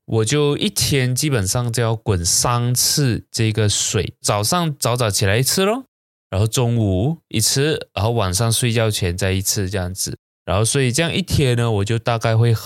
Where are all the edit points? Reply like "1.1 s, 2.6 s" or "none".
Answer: 10.3 s